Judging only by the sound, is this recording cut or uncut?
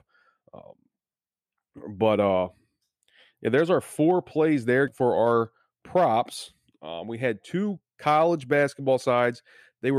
cut